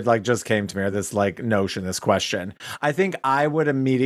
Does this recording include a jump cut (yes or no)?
no